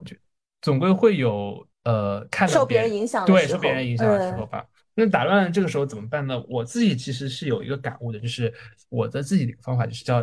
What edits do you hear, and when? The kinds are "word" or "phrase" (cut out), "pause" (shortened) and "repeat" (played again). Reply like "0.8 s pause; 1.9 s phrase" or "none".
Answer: 1.7 s pause